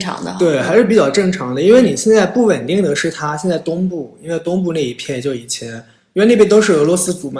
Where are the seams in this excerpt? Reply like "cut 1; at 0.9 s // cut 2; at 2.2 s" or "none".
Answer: none